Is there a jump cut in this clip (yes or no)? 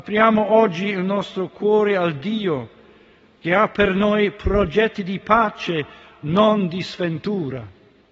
no